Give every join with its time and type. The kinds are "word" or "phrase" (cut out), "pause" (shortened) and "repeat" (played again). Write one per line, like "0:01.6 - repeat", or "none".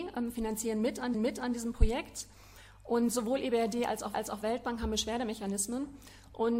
0:01.1 - repeat
0:04.1 - repeat

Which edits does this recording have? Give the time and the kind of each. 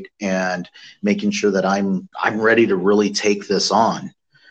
0:02.1 - pause

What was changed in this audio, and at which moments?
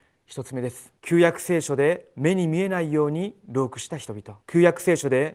0:01.0 - pause
0:04.4 - pause

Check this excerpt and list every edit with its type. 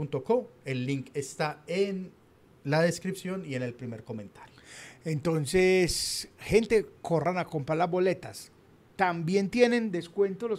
none

